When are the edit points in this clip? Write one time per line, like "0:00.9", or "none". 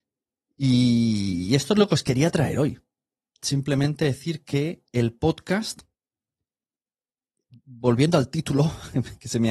0:03.1